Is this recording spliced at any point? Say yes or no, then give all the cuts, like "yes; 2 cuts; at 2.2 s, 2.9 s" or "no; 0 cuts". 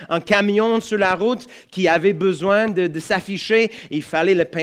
no; 0 cuts